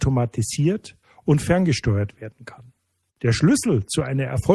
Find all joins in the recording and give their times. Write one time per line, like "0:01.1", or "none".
0:01.0